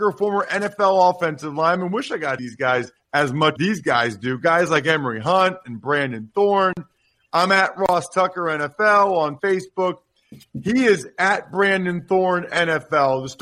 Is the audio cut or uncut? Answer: cut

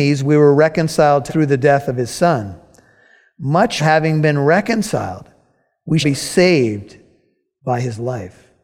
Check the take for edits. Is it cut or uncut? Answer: cut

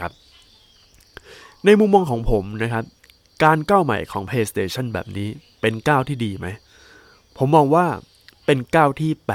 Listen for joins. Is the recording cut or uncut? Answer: uncut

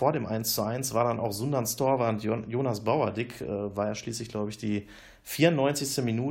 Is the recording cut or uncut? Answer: uncut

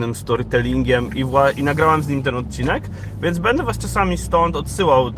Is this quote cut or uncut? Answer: uncut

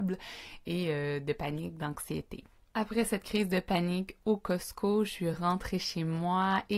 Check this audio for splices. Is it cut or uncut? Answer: uncut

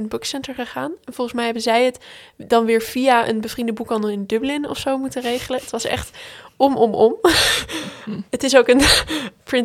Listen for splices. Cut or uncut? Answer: uncut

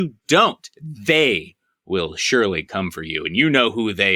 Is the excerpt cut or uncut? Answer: uncut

